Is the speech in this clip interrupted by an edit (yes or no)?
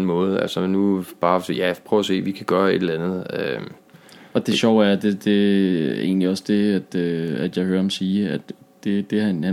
no